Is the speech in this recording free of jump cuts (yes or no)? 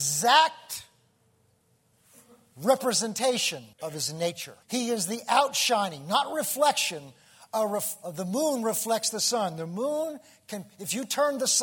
no